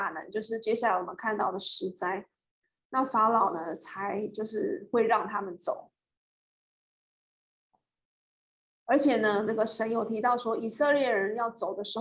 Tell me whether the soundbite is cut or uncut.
uncut